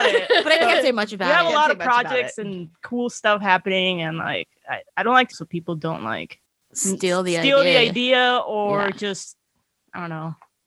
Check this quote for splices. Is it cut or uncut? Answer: cut